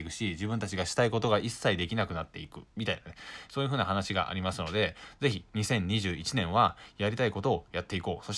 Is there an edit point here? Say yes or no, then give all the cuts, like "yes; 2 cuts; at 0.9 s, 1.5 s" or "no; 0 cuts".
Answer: yes; 1 cut; at 2.7 s